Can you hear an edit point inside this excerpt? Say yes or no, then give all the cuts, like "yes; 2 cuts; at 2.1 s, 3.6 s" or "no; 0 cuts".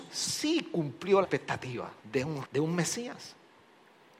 yes; 3 cuts; at 1.2 s, 2.0 s, 2.4 s